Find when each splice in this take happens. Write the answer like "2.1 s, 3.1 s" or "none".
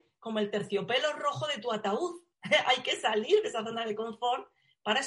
2.3 s